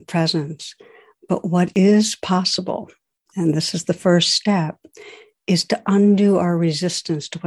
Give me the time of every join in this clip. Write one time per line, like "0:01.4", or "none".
none